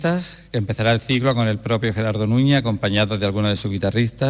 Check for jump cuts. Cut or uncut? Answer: uncut